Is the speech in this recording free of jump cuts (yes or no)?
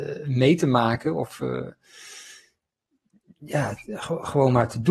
yes